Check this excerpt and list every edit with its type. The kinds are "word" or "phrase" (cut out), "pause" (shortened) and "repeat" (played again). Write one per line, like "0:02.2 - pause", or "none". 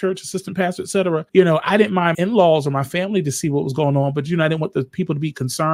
0:01.3 - pause
0:02.1 - word